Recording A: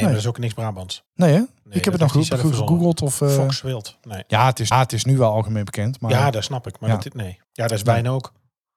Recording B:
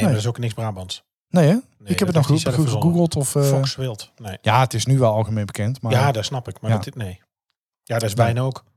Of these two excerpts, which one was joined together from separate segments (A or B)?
A